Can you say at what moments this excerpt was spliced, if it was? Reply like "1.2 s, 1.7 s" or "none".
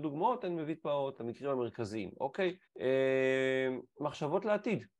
1.2 s, 2.7 s